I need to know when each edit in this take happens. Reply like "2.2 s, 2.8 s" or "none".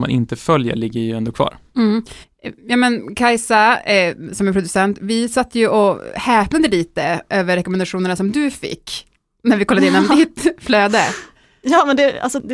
none